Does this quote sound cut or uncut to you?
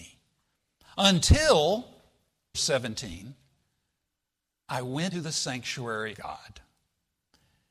cut